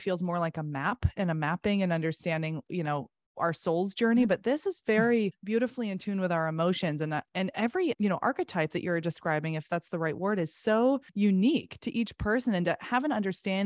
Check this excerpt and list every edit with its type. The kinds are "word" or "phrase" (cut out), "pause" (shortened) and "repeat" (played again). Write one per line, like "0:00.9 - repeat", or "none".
0:05.3 - word
0:07.9 - word
0:11.1 - pause